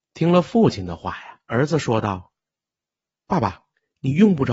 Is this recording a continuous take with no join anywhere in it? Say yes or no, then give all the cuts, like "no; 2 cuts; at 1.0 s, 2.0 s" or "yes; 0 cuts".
no; 2 cuts; at 1.4 s, 2.5 s